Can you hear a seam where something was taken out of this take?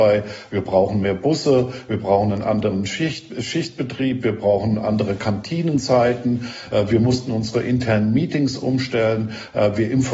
no; 0 cuts

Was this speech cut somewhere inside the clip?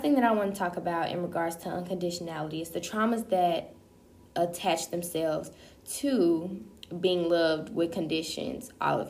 no; 0 cuts

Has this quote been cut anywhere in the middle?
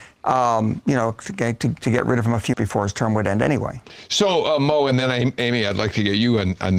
yes; 1 cut; at 2.5 s

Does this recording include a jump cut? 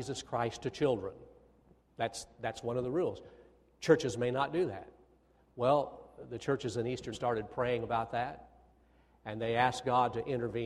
yes; 1 cut; at 7.1 s

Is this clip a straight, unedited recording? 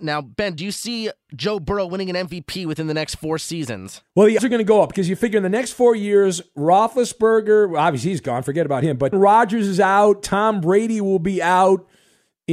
no; 2 cuts; at 4.4 s, 9.1 s

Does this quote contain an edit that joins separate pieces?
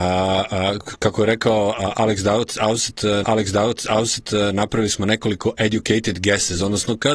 yes; 1 cut; at 3.2 s

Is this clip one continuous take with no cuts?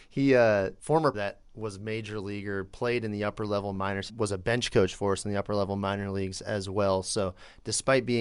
no; 3 cuts; at 1.1 s, 1.4 s, 4.1 s

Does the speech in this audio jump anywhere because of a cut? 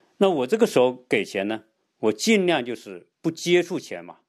yes; 1 cut; at 3.1 s

